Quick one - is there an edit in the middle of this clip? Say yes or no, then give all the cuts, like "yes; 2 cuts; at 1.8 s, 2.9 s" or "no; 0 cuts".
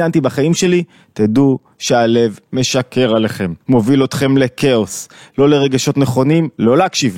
yes; 1 cut; at 3.6 s